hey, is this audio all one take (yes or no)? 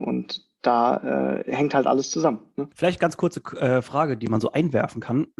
no